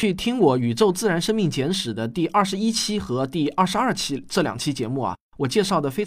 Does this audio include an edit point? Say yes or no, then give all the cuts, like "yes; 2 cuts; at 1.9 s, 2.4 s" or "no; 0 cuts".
no; 0 cuts